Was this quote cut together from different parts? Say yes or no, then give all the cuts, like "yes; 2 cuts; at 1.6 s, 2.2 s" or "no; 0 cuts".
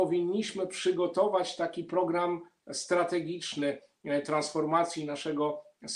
no; 0 cuts